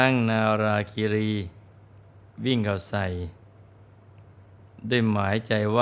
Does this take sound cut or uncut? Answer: uncut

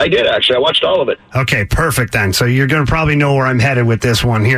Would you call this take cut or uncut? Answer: uncut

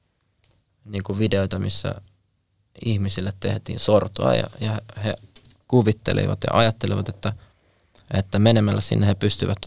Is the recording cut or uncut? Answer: uncut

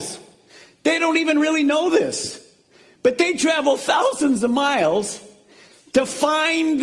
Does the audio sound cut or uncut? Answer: uncut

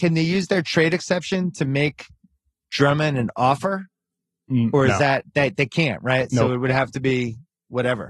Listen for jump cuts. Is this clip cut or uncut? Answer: uncut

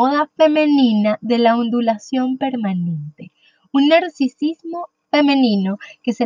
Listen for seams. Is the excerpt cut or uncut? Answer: uncut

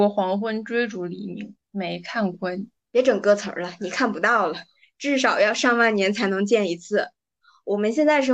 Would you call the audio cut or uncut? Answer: cut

